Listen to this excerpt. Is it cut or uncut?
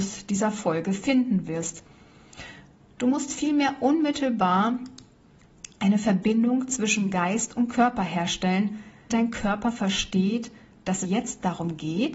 cut